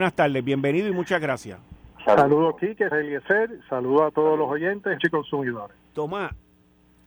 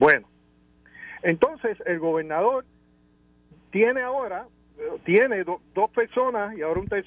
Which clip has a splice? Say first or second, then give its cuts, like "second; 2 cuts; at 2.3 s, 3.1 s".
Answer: first; 4 cuts; at 1.9 s, 2.9 s, 5.0 s, 5.9 s